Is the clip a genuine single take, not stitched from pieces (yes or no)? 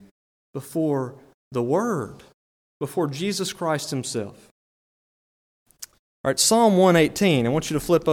no